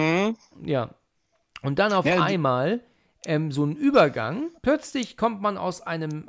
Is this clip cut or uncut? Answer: cut